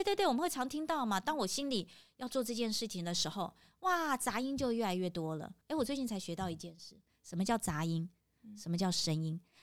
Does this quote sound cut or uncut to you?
cut